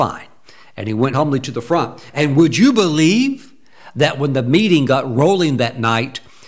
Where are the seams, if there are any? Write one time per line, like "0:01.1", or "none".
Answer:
0:01.1